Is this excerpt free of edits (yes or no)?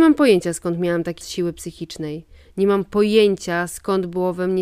no